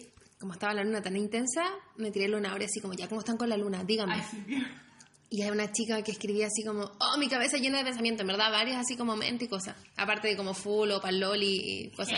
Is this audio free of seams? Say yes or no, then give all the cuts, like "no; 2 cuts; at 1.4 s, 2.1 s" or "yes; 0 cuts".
yes; 0 cuts